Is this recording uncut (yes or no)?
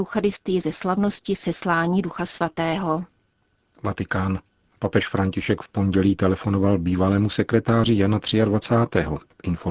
yes